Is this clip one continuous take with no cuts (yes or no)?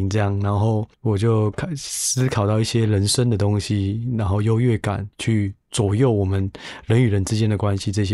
no